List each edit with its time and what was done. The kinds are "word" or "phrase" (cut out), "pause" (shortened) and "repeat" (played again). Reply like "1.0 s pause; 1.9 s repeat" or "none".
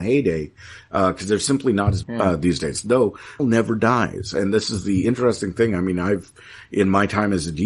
2.0 s phrase; 3.4 s word